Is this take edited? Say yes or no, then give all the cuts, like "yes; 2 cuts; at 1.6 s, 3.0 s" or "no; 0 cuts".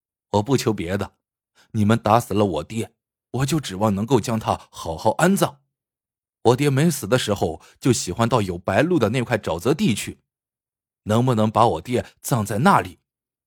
no; 0 cuts